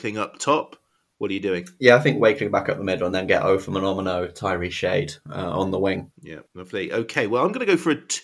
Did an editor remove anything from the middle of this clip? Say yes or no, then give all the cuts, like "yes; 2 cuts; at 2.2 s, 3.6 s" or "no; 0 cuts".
no; 0 cuts